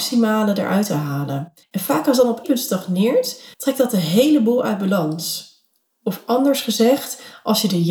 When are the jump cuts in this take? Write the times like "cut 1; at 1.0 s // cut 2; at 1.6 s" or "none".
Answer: cut 1; at 1.6 s // cut 2; at 2.4 s // cut 3; at 3.5 s